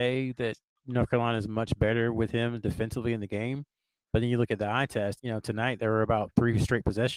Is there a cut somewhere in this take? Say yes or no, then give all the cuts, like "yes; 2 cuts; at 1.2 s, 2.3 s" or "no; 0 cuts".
yes; 1 cut; at 5.2 s